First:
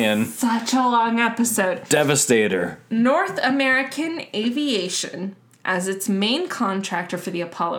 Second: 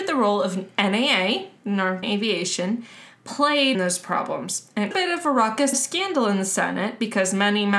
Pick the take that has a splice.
second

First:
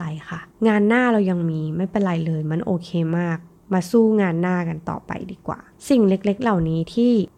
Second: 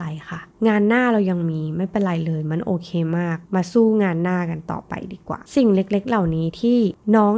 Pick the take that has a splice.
second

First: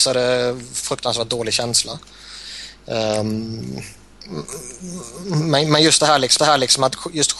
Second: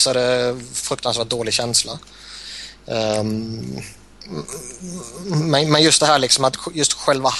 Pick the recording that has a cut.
first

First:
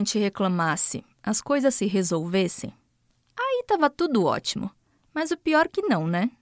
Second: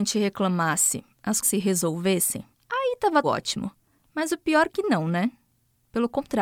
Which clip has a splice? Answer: second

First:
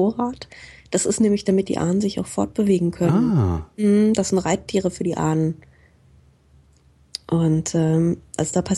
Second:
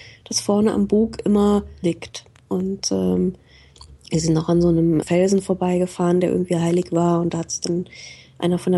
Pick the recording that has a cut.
second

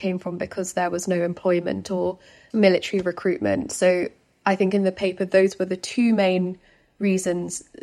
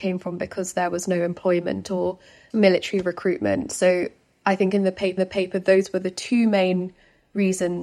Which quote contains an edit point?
second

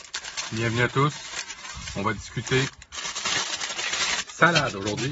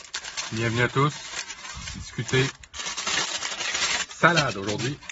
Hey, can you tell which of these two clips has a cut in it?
second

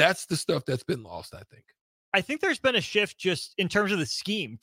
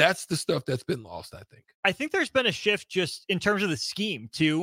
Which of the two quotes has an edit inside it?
second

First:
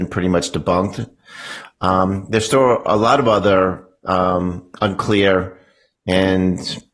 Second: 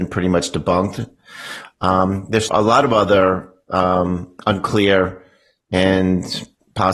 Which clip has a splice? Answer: second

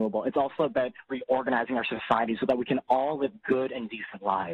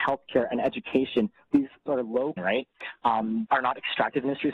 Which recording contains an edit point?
second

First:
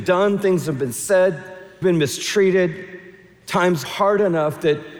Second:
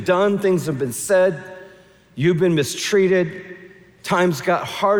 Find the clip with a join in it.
first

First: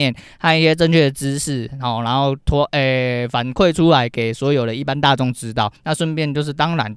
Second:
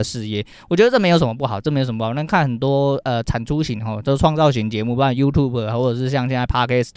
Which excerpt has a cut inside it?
first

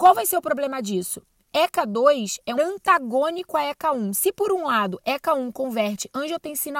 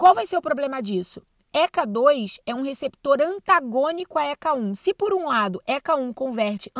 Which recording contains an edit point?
first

